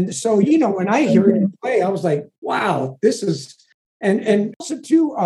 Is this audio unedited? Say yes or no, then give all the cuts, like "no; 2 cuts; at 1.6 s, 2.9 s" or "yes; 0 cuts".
yes; 0 cuts